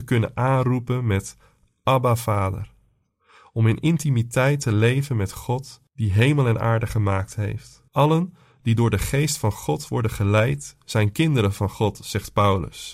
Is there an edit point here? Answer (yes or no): yes